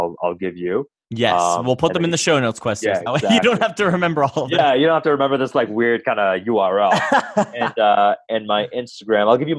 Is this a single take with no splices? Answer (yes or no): yes